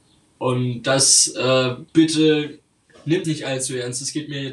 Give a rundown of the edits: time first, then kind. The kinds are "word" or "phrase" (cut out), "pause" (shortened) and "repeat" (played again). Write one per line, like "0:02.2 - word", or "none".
0:01.9 - pause
0:03.2 - word